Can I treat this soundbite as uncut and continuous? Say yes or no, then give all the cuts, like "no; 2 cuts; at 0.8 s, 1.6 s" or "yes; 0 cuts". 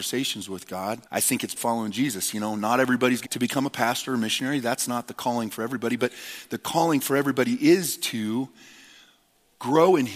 no; 3 cuts; at 1.1 s, 1.6 s, 3.2 s